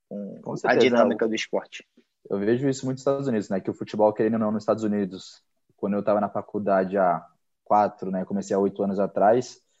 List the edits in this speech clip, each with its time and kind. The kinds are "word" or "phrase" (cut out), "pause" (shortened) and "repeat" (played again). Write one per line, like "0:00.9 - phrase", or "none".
none